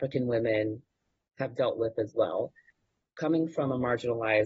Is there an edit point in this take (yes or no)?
no